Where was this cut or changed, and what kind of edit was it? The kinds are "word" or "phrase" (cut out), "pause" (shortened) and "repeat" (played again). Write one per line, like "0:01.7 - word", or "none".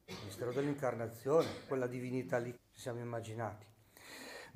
0:01.7 - word
0:02.5 - word